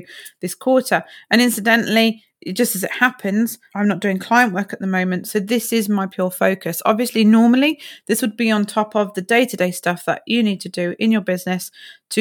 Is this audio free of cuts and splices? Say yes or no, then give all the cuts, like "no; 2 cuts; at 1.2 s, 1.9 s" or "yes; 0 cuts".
yes; 0 cuts